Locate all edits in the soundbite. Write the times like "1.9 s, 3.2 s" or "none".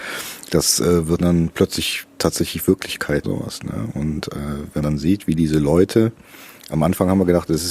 1.2 s, 3.2 s, 4.8 s